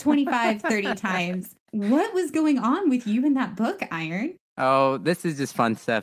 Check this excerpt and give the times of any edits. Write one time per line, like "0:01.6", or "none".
0:01.6
0:04.5